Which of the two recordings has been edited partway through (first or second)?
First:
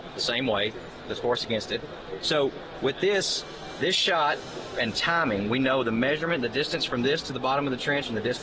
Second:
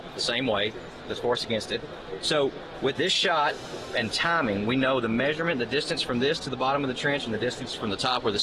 second